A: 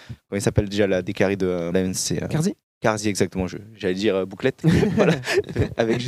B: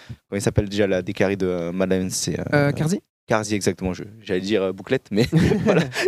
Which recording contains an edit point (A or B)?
A